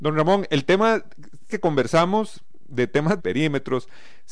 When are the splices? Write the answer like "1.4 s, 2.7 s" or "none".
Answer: 1.5 s, 3.2 s